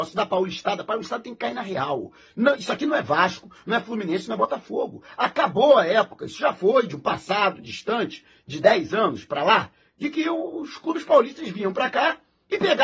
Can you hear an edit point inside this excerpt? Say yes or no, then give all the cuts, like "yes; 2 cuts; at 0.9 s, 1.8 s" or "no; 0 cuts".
no; 0 cuts